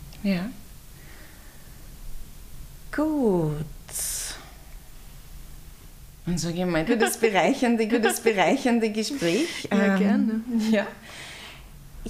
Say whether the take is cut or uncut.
cut